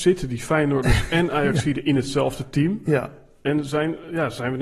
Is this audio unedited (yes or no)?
yes